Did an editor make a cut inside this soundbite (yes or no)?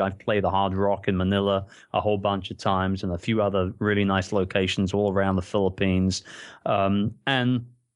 no